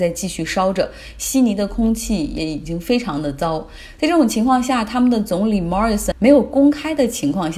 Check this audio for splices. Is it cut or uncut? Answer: cut